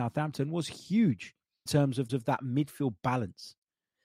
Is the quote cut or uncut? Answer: cut